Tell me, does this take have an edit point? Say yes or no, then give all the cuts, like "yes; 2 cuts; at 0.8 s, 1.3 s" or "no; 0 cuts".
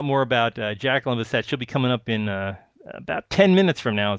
no; 0 cuts